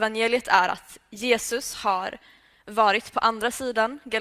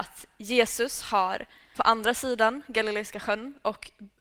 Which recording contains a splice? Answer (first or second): second